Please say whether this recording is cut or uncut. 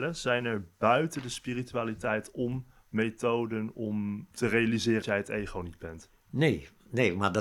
cut